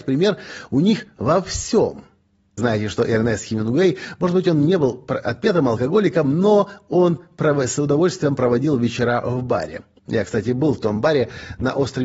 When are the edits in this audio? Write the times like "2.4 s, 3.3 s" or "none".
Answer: 2.6 s